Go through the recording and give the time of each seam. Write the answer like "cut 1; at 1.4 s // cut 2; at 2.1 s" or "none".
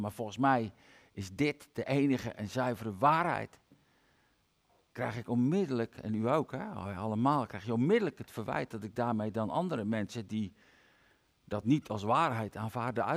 none